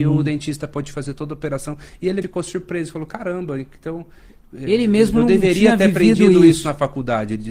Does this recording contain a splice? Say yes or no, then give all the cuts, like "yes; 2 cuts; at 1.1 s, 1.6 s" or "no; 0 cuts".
yes; 1 cut; at 2.2 s